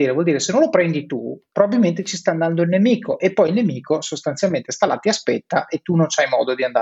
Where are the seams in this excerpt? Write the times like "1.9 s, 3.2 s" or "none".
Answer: none